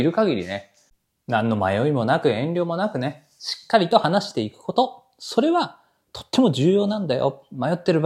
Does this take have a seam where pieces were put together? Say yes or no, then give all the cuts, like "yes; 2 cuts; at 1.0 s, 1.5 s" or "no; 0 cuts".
no; 0 cuts